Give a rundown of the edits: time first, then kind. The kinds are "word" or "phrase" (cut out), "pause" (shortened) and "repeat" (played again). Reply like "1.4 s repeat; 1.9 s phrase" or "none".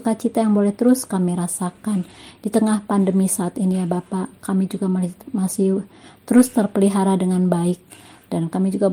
none